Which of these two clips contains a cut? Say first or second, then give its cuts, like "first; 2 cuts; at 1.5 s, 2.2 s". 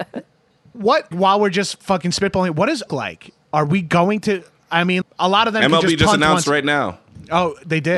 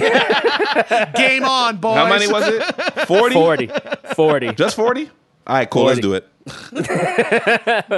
first; 3 cuts; at 1.1 s, 2.9 s, 5.0 s